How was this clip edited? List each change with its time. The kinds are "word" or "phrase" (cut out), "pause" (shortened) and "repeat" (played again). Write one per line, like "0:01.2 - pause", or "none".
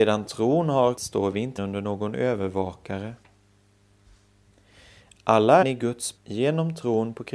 0:01.0 - word
0:01.6 - word
0:05.6 - word
0:06.2 - word

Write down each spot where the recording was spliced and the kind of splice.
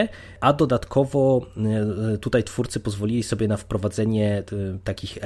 none

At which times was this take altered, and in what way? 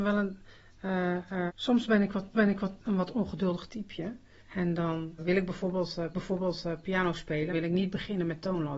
0:01.5 - word
0:02.3 - repeat
0:04.4 - pause
0:05.2 - word
0:06.1 - repeat
0:07.5 - phrase

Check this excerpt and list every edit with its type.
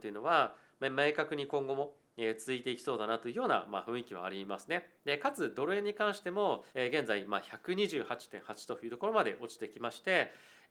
0:05.0 - pause
0:06.7 - pause

